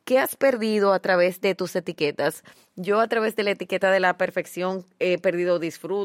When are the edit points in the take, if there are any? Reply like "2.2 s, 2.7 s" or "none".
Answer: none